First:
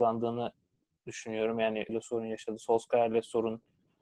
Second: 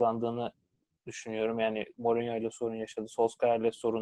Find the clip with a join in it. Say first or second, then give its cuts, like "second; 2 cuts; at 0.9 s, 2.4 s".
first; 1 cut; at 1.9 s